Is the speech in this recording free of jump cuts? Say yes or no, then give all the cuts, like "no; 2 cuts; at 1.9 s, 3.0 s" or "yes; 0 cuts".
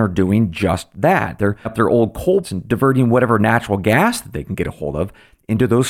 no; 2 cuts; at 1.6 s, 2.4 s